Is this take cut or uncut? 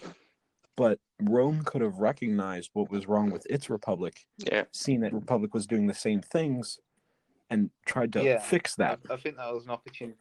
cut